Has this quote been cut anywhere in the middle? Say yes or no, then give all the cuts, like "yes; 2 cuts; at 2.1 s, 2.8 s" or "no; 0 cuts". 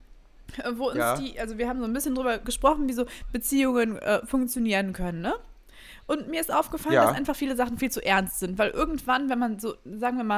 yes; 1 cut; at 2.4 s